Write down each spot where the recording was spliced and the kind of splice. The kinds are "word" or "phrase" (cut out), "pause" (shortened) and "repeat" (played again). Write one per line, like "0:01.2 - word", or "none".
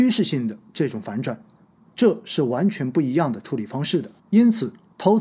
0:04.2 - pause